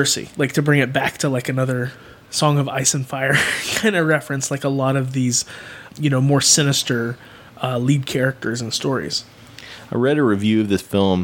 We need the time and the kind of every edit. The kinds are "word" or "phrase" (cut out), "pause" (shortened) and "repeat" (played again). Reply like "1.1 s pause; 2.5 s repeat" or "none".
none